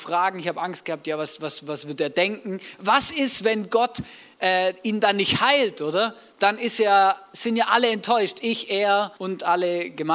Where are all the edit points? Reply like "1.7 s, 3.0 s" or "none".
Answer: 9.2 s